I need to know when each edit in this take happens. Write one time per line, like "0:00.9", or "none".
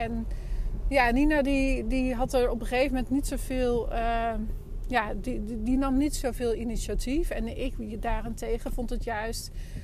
none